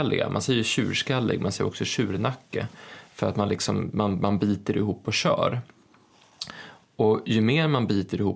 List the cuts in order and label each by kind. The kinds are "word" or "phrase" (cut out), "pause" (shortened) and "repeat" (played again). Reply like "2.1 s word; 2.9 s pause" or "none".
none